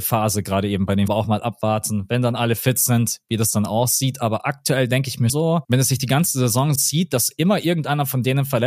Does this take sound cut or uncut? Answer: cut